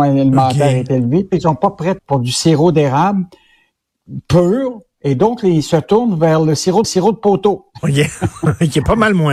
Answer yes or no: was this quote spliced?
yes